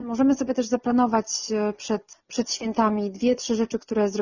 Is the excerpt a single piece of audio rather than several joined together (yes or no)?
yes